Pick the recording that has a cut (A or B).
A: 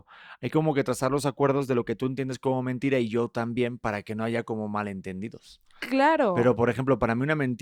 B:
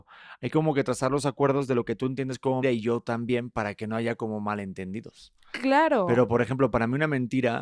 B